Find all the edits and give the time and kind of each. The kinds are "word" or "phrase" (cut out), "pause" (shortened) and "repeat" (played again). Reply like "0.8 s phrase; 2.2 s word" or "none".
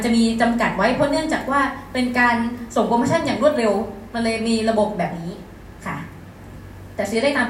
none